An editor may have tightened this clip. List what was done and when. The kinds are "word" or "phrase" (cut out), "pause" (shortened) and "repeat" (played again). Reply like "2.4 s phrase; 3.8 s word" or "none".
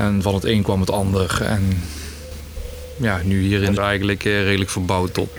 3.8 s word